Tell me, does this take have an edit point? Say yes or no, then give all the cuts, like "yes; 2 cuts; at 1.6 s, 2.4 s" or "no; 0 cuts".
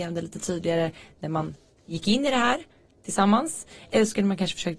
no; 0 cuts